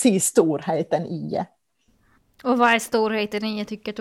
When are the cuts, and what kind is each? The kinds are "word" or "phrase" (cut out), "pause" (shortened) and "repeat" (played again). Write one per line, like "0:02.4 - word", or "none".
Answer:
none